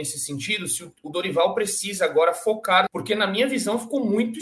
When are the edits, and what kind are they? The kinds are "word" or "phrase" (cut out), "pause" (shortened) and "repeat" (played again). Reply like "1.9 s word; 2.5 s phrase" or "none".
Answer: 2.9 s phrase